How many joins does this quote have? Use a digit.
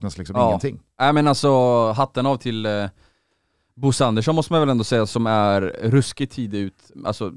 0